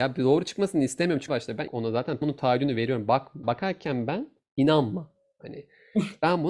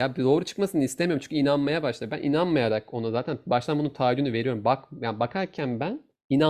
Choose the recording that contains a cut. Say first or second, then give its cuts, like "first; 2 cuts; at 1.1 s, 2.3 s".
first; 4 cuts; at 1.3 s, 1.7 s, 2.2 s, 3.4 s